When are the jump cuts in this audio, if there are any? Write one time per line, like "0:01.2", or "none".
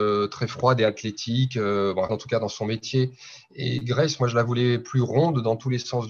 0:02.1